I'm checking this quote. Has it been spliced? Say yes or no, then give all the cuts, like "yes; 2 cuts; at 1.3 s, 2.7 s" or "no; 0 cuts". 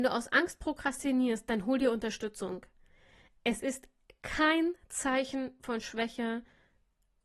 no; 0 cuts